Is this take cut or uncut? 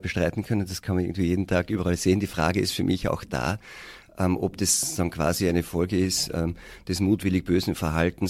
uncut